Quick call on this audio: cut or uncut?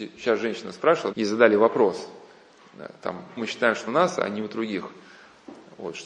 cut